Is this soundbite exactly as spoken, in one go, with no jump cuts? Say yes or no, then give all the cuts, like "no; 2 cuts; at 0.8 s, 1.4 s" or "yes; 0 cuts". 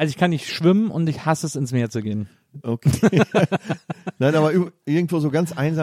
yes; 0 cuts